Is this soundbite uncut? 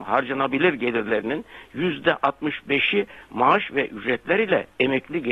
yes; 0 cuts

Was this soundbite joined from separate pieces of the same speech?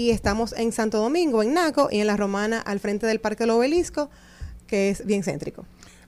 no; 0 cuts

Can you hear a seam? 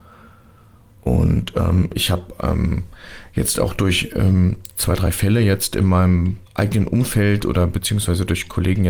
yes; 1 cut; at 6.5 s

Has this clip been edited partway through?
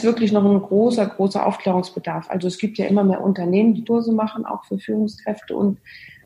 yes; 1 cut; at 3.9 s

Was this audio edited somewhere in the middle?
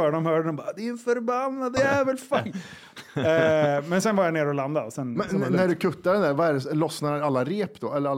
yes; 1 cut; at 1.8 s

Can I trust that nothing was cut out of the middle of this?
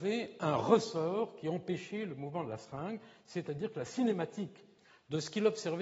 yes; 0 cuts

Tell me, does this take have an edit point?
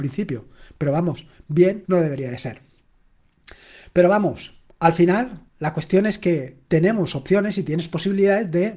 yes; 2 cuts; at 1.8 s, 5.5 s

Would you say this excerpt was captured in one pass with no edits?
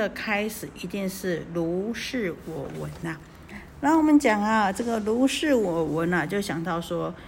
yes; 0 cuts

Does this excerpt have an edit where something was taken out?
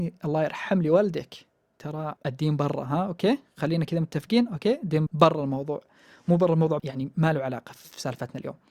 yes; 3 cuts; at 2.2 s, 5.1 s, 6.8 s

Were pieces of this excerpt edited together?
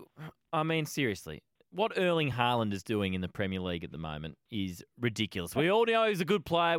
no; 0 cuts

